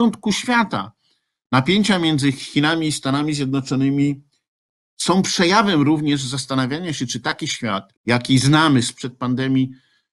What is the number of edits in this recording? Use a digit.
1